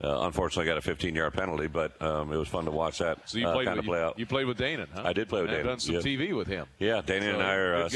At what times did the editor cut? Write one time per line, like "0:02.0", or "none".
0:03.2